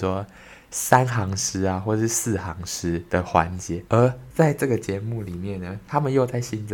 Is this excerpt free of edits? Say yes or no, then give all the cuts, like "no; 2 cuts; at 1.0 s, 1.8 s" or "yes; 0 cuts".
no; 1 cut; at 3.1 s